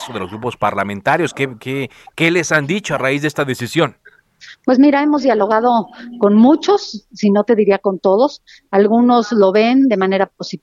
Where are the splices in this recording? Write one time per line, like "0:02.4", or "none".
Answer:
none